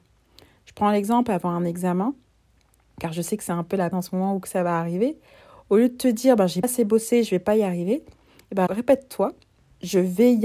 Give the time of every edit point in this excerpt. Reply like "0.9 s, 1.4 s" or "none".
3.9 s, 6.6 s, 8.7 s

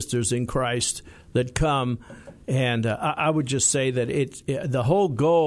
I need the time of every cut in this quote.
none

